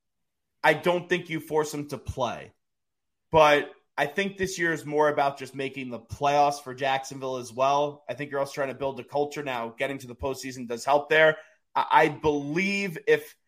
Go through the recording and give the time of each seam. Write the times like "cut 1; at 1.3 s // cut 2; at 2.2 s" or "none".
none

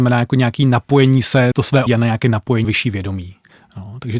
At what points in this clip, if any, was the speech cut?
cut 1; at 1.5 s // cut 2; at 1.9 s // cut 3; at 2.6 s

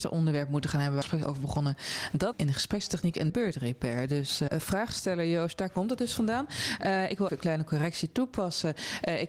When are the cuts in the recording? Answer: cut 1; at 1.0 s // cut 2; at 2.3 s // cut 3; at 3.3 s // cut 4; at 4.5 s // cut 5; at 7.3 s

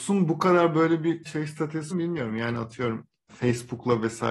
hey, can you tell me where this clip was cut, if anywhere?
cut 1; at 1.2 s // cut 2; at 1.9 s // cut 3; at 3.3 s

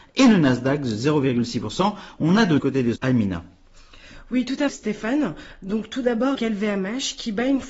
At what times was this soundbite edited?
cut 1; at 2.6 s // cut 2; at 3.0 s // cut 3; at 4.7 s // cut 4; at 6.3 s

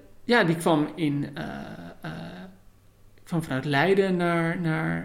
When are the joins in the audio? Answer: none

